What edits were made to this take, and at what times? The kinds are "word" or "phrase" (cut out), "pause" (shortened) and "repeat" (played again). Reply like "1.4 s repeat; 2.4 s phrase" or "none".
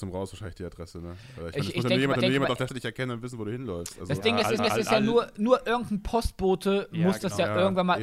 2.2 s repeat; 2.7 s word; 4.6 s repeat